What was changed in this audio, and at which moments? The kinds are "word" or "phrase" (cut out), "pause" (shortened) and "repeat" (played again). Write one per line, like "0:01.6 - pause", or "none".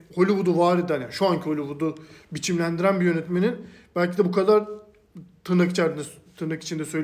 none